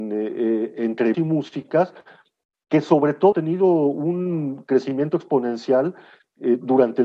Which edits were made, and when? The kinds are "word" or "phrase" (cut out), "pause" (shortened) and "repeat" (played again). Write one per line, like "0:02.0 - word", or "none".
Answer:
0:01.1 - word
0:03.3 - word